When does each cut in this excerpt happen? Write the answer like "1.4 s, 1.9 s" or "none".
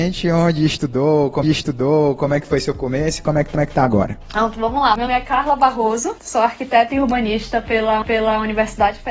1.4 s, 3.5 s, 5.1 s, 8.0 s